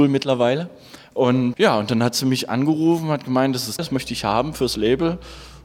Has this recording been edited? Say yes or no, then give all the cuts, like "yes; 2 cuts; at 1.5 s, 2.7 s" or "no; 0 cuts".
yes; 2 cuts; at 1.5 s, 3.8 s